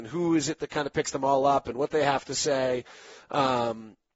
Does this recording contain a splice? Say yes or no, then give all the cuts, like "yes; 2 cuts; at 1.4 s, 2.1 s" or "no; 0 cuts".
no; 0 cuts